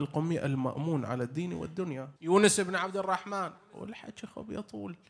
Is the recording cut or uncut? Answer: cut